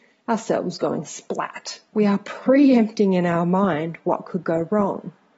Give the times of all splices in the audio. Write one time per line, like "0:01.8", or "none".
0:01.9